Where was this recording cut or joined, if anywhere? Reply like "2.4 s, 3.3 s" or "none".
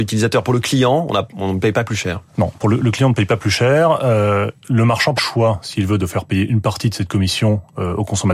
2.3 s, 4.6 s, 5.2 s